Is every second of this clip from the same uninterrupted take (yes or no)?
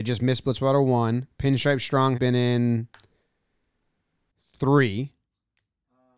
no